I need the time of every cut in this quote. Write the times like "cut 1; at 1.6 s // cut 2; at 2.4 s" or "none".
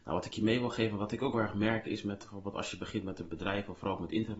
cut 1; at 1.3 s

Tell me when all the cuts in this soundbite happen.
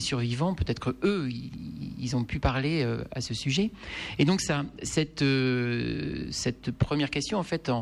none

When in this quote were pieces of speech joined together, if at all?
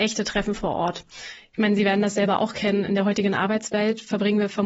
none

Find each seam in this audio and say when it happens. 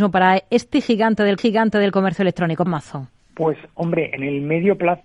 cut 1; at 1.4 s // cut 2; at 2.7 s // cut 3; at 3.2 s

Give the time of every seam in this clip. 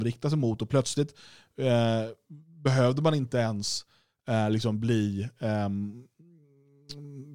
none

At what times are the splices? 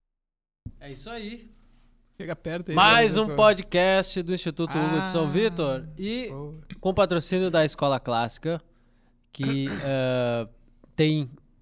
none

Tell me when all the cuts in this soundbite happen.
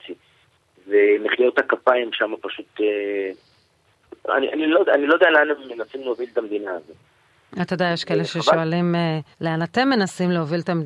cut 1; at 9.3 s

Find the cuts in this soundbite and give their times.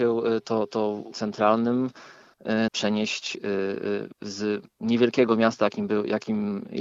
cut 1; at 1.1 s // cut 2; at 2.7 s

